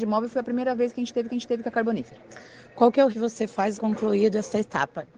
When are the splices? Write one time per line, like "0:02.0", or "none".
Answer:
0:01.3
0:03.1
0:03.8